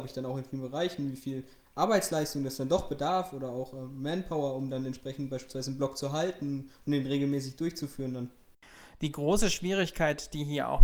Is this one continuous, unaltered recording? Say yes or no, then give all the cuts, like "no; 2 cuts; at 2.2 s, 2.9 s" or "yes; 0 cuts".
yes; 0 cuts